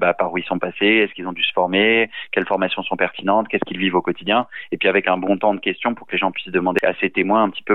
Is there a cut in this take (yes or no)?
yes